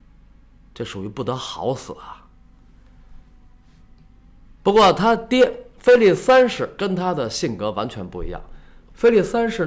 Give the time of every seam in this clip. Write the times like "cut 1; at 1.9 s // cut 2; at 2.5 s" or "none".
none